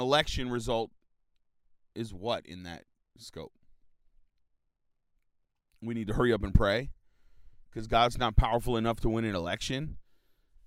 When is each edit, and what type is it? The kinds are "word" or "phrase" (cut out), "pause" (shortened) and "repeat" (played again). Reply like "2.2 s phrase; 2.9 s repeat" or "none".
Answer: none